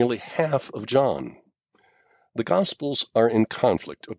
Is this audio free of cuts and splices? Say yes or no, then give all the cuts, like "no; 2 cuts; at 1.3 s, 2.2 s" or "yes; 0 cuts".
yes; 0 cuts